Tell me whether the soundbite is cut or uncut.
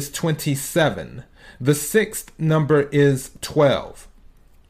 uncut